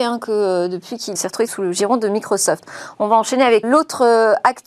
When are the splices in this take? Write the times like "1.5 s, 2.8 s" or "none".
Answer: 1.2 s, 1.5 s, 3.6 s